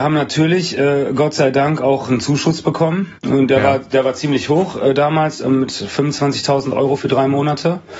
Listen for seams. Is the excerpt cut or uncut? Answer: cut